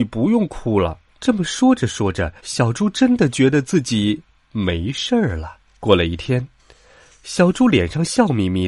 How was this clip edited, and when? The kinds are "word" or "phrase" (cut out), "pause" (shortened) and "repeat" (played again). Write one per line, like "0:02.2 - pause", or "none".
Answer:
0:01.1 - pause
0:02.4 - pause
0:04.4 - pause
0:05.7 - pause